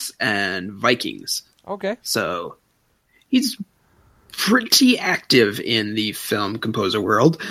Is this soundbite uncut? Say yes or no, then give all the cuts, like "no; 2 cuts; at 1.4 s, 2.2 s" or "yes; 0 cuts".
yes; 0 cuts